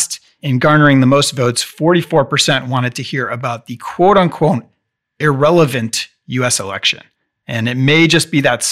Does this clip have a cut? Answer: no; 0 cuts

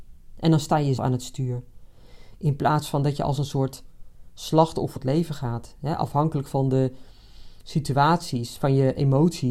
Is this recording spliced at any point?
yes; 2 cuts; at 1.0 s, 5.0 s

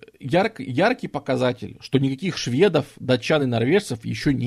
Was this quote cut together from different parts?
no; 0 cuts

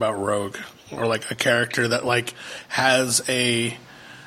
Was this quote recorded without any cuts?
yes; 0 cuts

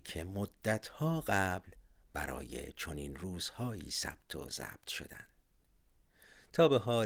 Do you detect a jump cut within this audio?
no; 0 cuts

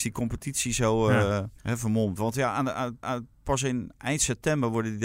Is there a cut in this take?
yes; 2 cuts; at 1.6 s, 3.0 s

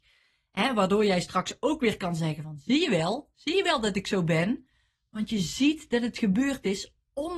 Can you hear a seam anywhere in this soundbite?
no; 0 cuts

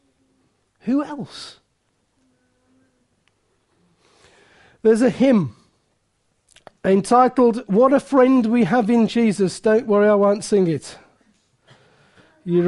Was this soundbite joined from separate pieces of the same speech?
no; 0 cuts

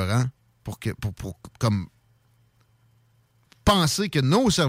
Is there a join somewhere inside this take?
no; 0 cuts

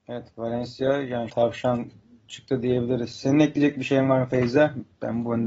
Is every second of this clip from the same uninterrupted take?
no; 1 cut; at 1.3 s

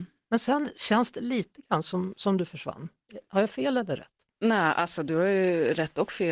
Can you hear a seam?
no; 0 cuts

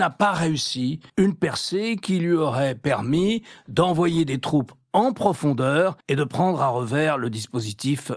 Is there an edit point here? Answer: yes; 2 cuts; at 1.1 s, 6.0 s

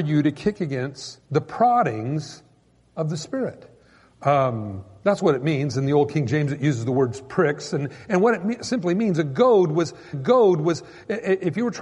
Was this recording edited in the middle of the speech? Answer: yes; 2 cuts; at 1.2 s, 10.1 s

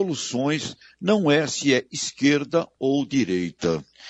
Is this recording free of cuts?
yes; 0 cuts

